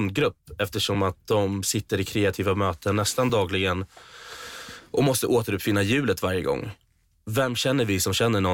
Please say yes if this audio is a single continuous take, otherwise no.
yes